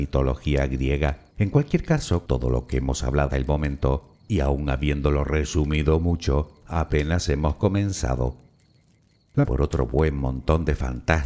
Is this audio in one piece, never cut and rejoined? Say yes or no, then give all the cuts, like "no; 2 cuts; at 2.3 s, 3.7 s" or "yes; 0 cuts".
no; 4 cuts; at 1.3 s, 2.3 s, 3.3 s, 9.4 s